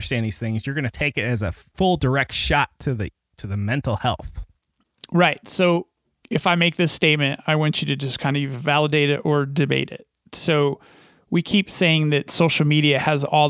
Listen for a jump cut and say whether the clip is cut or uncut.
uncut